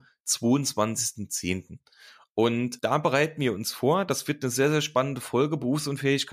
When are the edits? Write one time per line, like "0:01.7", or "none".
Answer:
0:02.8